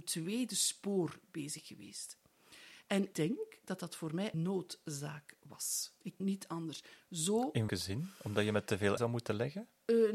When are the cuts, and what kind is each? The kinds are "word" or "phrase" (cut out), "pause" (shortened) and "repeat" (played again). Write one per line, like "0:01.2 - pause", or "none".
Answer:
0:03.1 - word
0:04.3 - word
0:06.2 - word
0:07.7 - word
0:09.0 - phrase

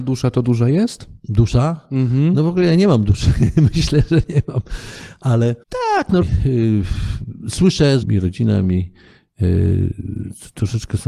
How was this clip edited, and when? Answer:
0:01.2 - pause
0:05.6 - pause
0:06.2 - word
0:08.0 - phrase

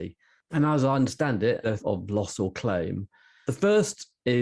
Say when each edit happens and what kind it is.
0:01.8 - phrase

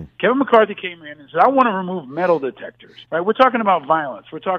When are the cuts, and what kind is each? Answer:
0:03.0 - pause

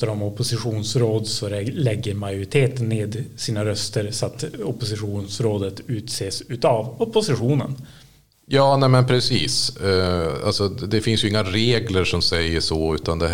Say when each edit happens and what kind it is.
none

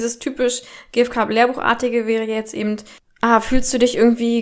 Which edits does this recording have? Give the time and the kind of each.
none

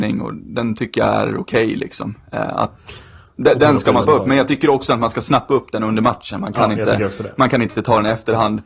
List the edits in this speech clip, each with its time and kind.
0:04.0 - word

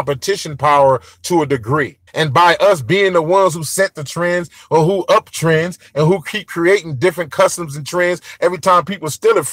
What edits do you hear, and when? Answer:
0:02.1 - pause

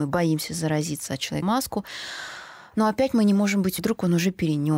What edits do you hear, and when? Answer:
0:01.4 - word
0:03.8 - word

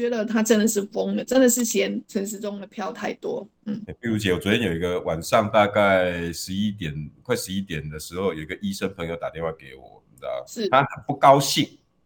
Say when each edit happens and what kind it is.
0:02.0 - pause

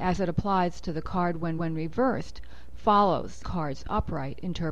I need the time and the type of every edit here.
0:01.6 - repeat
0:03.4 - word

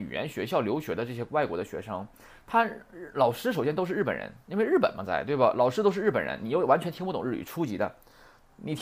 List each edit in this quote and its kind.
none

